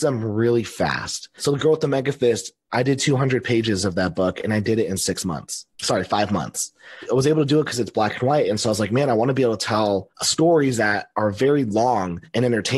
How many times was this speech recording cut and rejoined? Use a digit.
1